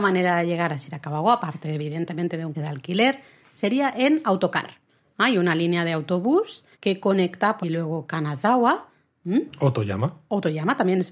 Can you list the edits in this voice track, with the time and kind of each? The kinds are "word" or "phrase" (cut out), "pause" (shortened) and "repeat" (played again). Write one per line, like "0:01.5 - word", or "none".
0:02.5 - word
0:06.7 - pause
0:07.6 - phrase